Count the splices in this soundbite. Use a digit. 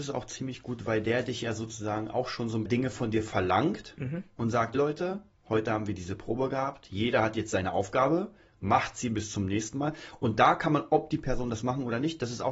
2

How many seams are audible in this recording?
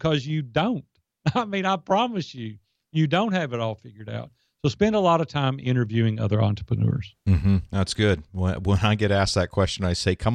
0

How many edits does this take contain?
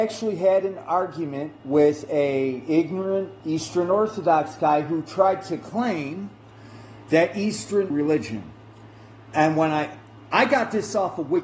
3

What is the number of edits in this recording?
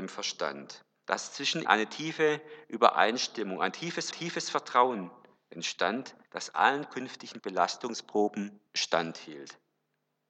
4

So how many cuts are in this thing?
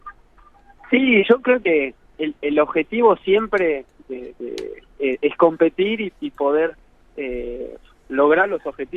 0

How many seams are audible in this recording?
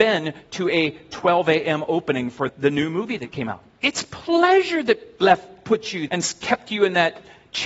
2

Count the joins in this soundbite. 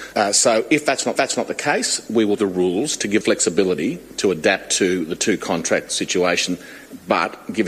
3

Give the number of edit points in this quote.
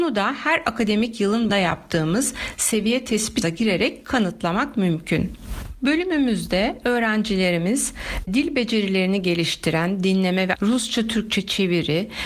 4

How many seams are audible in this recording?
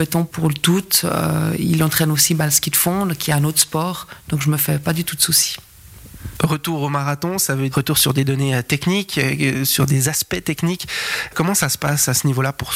1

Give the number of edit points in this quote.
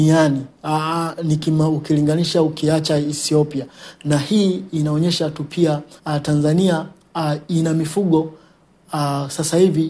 1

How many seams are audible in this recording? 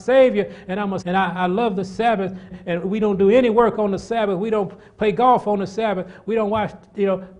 2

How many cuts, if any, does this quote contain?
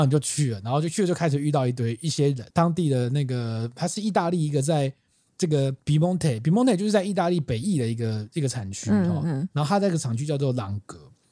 2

